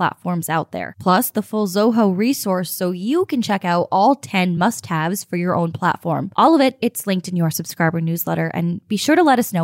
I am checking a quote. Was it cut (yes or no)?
no